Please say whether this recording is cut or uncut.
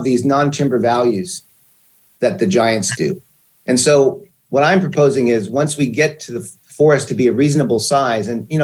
uncut